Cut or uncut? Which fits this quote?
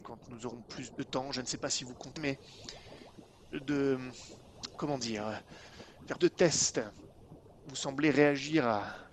cut